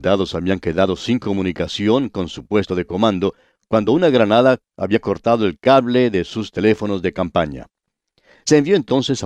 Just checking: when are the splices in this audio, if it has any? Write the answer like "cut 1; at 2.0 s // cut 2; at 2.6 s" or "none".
none

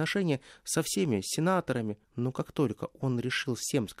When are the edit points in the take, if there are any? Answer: cut 1; at 2.0 s

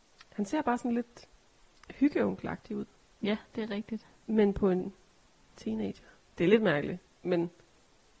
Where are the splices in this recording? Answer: cut 1; at 6.2 s

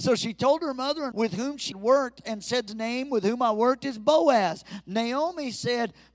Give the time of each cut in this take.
cut 1; at 1.1 s // cut 2; at 1.7 s // cut 3; at 2.7 s

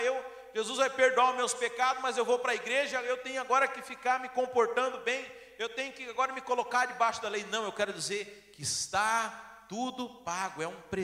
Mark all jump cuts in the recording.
none

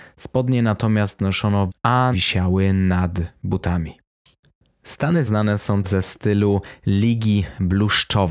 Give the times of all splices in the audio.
cut 1; at 1.7 s // cut 2; at 2.1 s // cut 3; at 5.3 s // cut 4; at 5.8 s

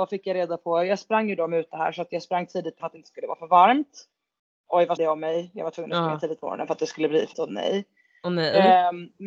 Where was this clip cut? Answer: cut 1; at 2.8 s // cut 2; at 5.0 s // cut 3; at 7.3 s

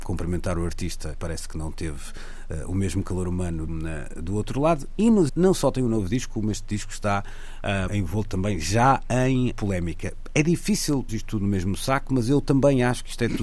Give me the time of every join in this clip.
cut 1; at 1.1 s // cut 2; at 3.7 s // cut 3; at 5.3 s // cut 4; at 7.9 s // cut 5; at 9.5 s // cut 6; at 11.1 s

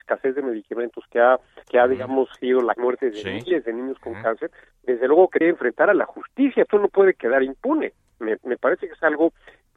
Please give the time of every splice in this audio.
cut 1; at 1.6 s // cut 2; at 2.4 s // cut 3; at 2.7 s // cut 4; at 5.4 s // cut 5; at 6.7 s

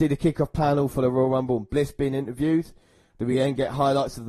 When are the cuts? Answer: none

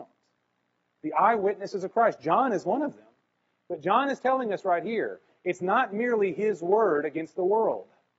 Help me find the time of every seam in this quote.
none

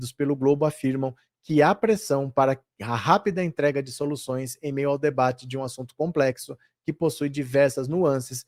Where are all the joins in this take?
none

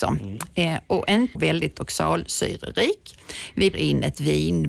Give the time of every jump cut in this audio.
cut 1; at 1.3 s // cut 2; at 3.7 s

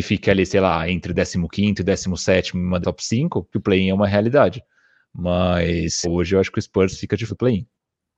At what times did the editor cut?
cut 1; at 2.8 s // cut 2; at 3.5 s // cut 3; at 6.0 s // cut 4; at 7.3 s

